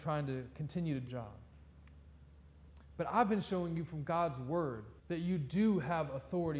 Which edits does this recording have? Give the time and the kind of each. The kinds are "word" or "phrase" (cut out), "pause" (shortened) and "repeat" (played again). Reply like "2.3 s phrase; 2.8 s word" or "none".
1.1 s word; 5.0 s pause